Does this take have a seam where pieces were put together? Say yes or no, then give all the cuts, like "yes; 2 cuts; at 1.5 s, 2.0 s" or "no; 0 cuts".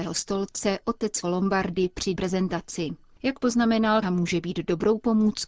yes; 3 cuts; at 1.2 s, 2.2 s, 4.0 s